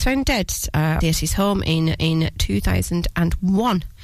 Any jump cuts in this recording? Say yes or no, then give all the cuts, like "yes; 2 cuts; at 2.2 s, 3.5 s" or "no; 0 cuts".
yes; 2 cuts; at 1.0 s, 2.0 s